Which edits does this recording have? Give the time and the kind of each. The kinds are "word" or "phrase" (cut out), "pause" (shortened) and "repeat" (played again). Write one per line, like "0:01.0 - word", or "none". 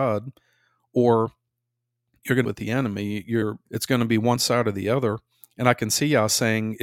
0:02.4 - phrase
0:03.6 - pause